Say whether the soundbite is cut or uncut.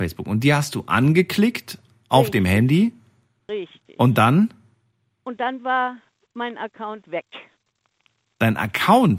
uncut